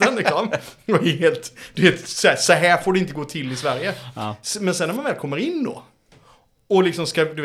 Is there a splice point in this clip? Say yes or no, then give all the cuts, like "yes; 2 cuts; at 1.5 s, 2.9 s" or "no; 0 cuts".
no; 0 cuts